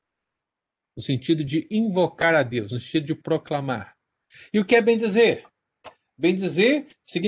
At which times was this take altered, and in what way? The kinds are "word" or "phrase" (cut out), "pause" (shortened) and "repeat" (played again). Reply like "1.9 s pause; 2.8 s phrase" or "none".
none